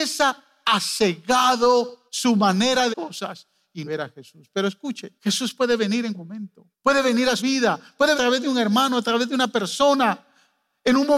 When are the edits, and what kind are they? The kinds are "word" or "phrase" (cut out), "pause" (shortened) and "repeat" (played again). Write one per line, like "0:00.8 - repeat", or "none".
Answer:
0:02.1 - pause
0:02.9 - phrase
0:03.8 - phrase
0:05.2 - pause
0:06.1 - word
0:06.7 - pause
0:07.4 - word
0:08.1 - phrase